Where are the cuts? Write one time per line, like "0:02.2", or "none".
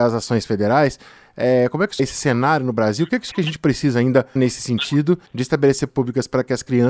0:02.0
0:03.3
0:04.4
0:05.3
0:05.9